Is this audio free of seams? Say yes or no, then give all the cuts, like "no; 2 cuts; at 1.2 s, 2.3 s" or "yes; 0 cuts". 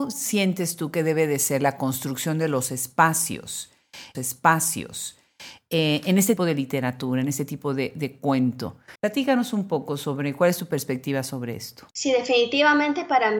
no; 4 cuts; at 4.1 s, 6.4 s, 9.0 s, 11.9 s